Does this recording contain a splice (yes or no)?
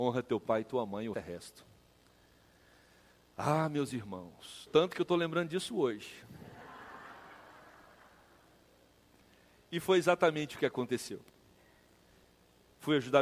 yes